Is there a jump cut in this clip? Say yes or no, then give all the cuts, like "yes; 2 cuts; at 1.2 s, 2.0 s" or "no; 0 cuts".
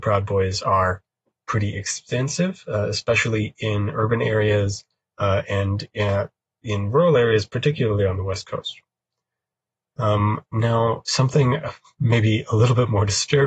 no; 0 cuts